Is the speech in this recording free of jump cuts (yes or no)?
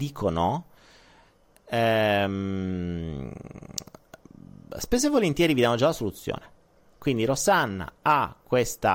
yes